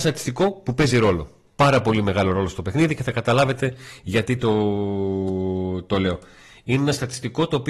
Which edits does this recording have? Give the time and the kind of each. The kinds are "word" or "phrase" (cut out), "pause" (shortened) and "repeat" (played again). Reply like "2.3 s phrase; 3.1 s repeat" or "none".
none